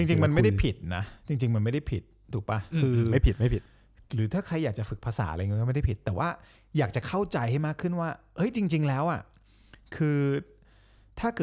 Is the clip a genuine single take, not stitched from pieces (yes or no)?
yes